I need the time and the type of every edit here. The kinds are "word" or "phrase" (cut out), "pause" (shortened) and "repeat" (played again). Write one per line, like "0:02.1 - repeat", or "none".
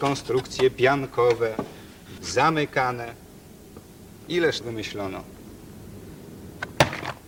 0:02.2 - word
0:04.6 - word